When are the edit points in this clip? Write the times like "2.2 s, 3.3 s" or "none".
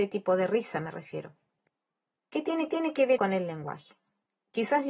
2.7 s, 3.2 s